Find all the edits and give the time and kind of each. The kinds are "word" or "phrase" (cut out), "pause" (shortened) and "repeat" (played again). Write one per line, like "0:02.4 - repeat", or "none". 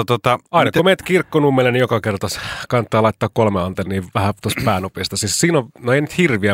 0:04.4 - word

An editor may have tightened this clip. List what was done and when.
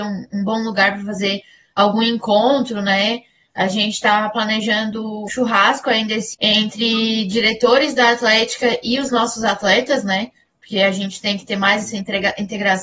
0:05.3 - word
0:06.3 - word

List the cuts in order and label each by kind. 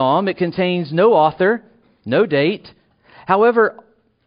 none

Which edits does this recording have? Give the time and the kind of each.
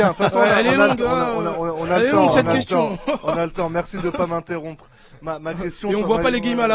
none

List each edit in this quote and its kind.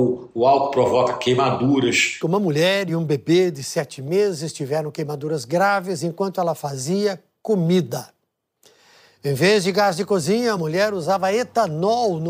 none

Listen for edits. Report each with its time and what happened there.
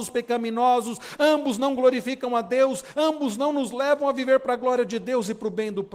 none

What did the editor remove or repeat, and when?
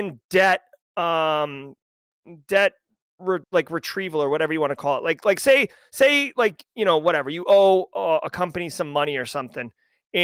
0:03.4 - pause

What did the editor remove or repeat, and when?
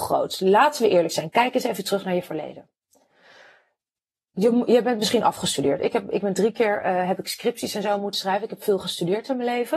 none

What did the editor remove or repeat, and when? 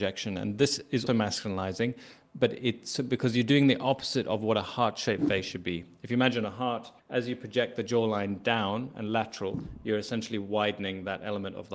0:01.1 - word
0:07.0 - pause

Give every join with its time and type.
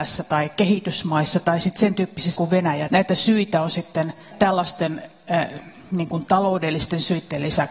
0:02.4 - word
0:02.9 - word
0:04.3 - word

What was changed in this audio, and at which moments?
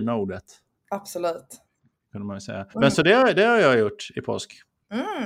0:02.7 - pause

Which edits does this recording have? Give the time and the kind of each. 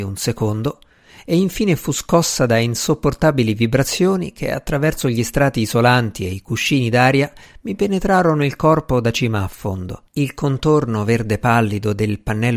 0:10.1 - pause

